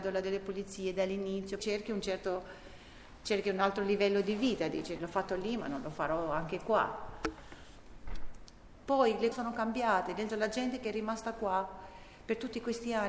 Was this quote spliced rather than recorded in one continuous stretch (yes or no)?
yes